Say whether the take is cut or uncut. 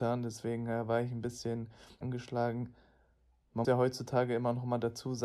cut